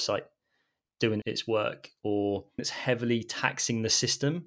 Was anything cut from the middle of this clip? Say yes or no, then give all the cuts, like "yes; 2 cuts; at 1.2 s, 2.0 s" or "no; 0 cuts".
yes; 2 cuts; at 1.2 s, 2.6 s